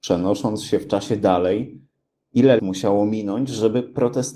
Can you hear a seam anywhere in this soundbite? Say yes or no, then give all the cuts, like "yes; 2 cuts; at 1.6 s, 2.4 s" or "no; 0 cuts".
yes; 1 cut; at 2.6 s